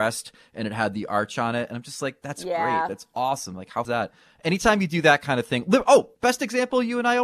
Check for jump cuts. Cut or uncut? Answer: cut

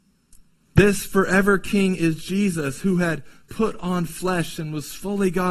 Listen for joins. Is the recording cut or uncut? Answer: uncut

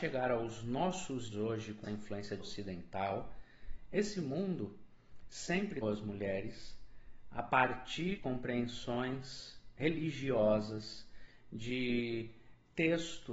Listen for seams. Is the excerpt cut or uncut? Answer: cut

